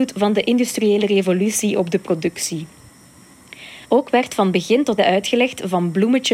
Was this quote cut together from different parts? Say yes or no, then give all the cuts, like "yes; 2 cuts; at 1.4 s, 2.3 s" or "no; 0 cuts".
yes; 2 cuts; at 3.8 s, 5.0 s